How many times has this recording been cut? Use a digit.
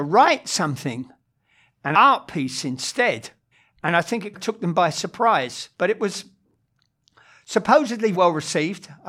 5